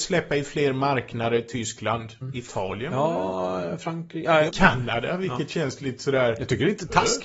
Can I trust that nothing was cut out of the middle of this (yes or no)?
no